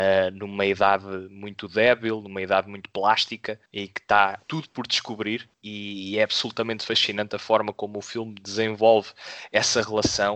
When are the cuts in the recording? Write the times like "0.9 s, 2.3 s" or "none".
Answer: 3.7 s, 4.4 s, 5.5 s